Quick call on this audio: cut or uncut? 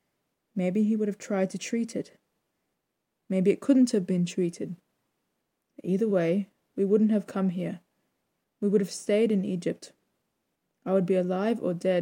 uncut